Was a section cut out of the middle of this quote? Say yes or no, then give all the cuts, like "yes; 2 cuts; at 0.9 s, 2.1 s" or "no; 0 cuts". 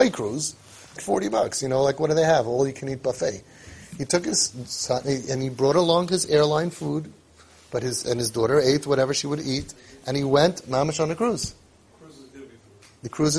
yes; 1 cut; at 1.0 s